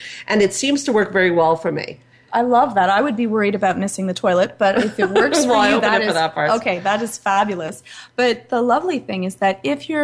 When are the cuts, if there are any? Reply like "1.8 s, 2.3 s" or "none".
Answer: none